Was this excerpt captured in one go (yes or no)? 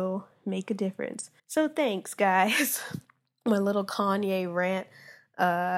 no